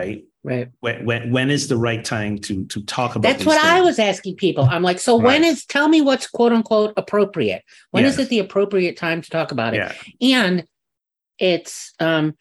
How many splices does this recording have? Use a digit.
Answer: 1